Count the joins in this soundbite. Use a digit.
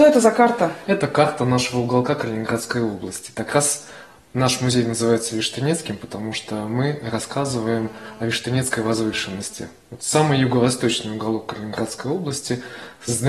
0